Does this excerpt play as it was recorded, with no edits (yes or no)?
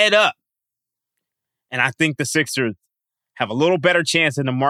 yes